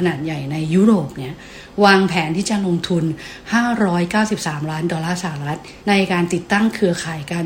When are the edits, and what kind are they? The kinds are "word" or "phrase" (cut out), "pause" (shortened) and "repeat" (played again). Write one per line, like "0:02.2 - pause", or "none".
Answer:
0:05.8 - pause